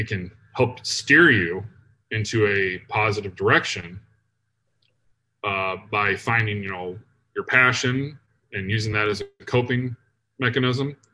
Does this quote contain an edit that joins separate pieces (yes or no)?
no